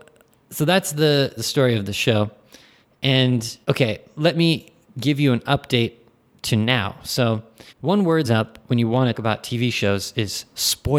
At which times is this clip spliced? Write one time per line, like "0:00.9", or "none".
0:01.4
0:03.6
0:07.7
0:08.2
0:09.1